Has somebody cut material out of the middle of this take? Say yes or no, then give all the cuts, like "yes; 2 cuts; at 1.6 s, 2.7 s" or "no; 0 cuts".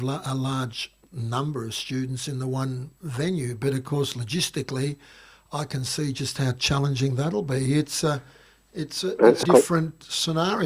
yes; 1 cut; at 9.4 s